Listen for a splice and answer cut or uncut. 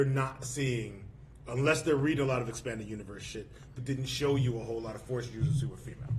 cut